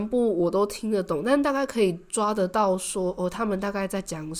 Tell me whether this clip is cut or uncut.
uncut